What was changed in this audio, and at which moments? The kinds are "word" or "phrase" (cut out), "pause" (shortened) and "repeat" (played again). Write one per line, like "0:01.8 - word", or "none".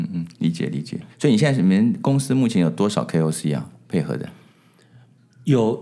0:01.1 - pause